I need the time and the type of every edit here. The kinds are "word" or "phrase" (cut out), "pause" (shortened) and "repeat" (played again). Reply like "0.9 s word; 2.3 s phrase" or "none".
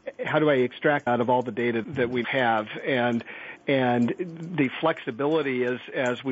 1.1 s phrase; 1.8 s word; 2.2 s word